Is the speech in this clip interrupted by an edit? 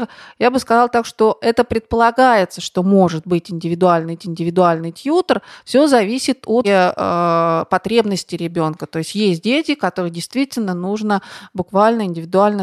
yes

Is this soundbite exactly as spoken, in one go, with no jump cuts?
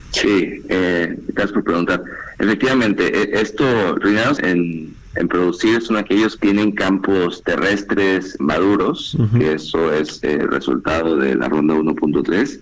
no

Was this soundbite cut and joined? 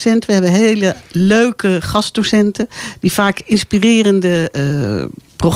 no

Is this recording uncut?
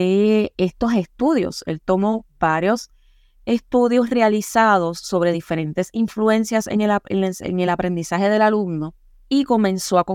yes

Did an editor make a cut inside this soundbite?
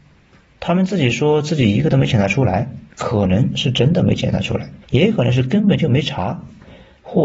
yes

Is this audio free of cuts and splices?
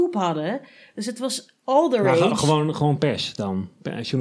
yes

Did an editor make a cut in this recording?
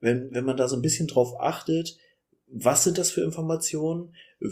no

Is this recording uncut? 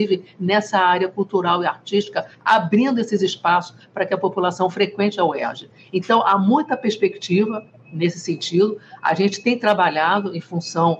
yes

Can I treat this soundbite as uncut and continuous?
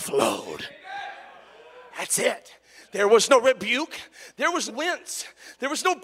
no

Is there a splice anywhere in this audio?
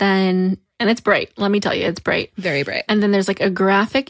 no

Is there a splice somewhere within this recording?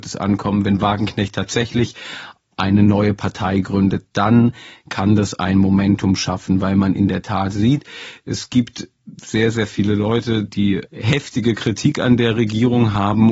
no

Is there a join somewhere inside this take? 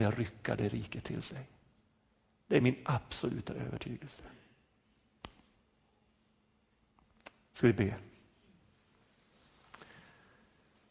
no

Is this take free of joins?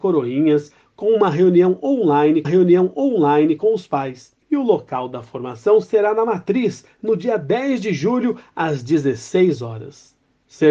no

